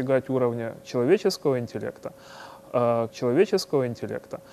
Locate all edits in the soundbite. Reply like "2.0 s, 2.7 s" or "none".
3.1 s